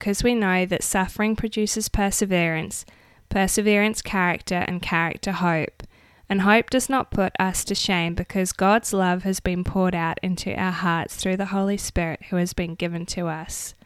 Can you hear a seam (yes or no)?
no